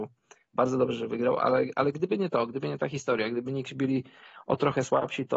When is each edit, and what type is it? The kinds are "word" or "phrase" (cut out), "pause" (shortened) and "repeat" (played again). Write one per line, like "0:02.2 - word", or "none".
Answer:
none